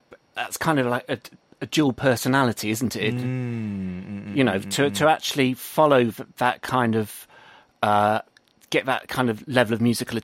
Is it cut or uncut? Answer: uncut